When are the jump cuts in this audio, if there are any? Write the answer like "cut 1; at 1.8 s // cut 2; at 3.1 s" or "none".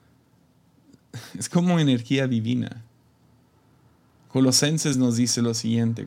none